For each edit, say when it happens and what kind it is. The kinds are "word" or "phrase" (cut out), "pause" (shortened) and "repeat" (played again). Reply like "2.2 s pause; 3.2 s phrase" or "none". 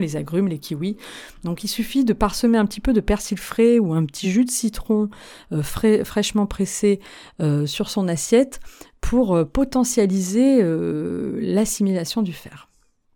none